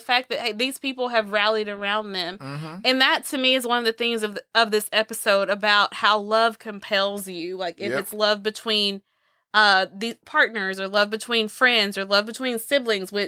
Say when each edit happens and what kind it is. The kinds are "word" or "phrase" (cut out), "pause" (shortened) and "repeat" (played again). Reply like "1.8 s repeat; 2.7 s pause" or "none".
none